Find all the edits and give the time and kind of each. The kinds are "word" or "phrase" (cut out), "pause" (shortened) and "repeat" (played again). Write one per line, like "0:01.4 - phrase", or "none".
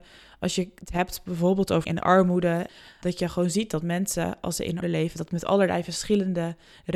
0:01.8 - word
0:04.8 - word